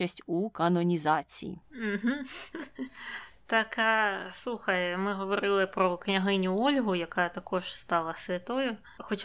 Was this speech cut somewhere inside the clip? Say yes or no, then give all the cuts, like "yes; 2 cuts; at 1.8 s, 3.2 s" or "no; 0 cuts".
no; 0 cuts